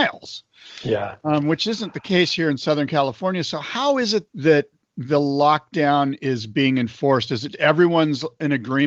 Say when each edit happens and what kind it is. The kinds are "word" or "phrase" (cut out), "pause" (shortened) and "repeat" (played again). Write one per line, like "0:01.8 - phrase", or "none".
0:04.3 - word
0:07.5 - word